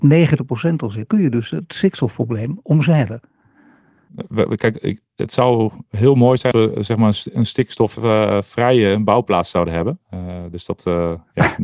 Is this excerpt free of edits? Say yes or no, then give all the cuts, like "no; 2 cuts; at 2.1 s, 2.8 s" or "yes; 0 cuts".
no; 2 cuts; at 1.1 s, 6.5 s